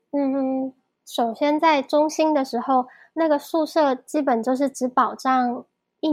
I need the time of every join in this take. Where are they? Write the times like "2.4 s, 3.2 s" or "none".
none